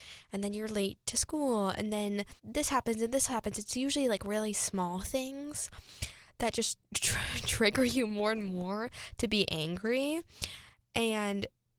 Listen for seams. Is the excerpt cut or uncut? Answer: cut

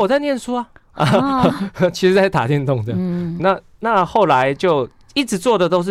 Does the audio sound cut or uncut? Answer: cut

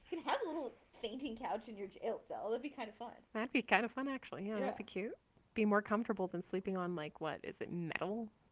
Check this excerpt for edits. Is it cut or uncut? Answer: uncut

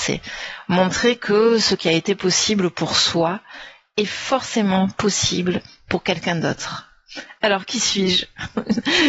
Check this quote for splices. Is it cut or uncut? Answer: uncut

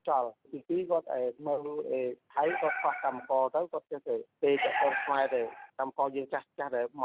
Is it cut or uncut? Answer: cut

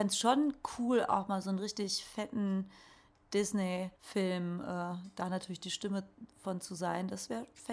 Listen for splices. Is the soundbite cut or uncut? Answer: cut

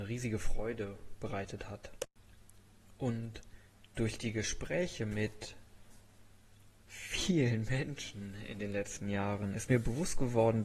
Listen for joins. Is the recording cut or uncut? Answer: cut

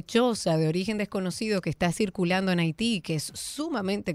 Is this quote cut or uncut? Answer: uncut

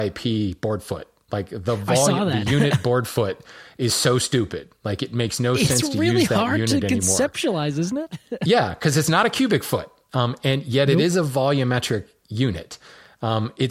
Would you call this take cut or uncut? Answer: uncut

